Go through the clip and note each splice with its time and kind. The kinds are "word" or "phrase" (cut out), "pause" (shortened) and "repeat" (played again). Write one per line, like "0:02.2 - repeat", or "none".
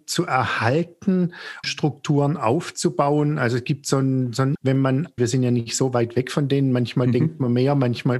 0:01.6 - word
0:04.5 - phrase
0:05.2 - phrase